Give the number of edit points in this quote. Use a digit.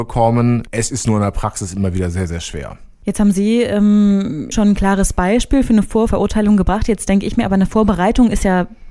1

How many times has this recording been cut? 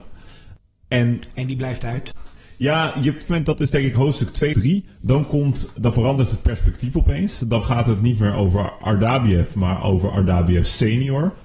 3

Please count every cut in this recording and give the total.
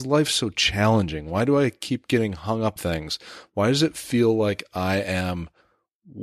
1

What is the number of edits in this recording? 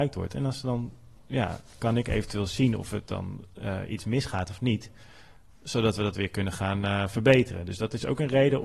0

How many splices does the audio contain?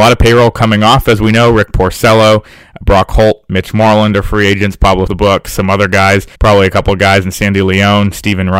2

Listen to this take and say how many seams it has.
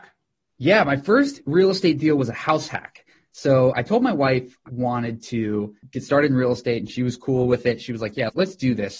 1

